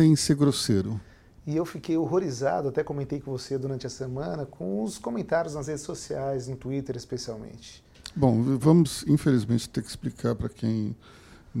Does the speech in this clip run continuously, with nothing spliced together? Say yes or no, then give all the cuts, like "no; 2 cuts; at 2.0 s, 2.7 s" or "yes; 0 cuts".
yes; 0 cuts